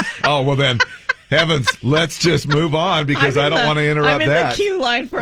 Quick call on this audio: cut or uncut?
uncut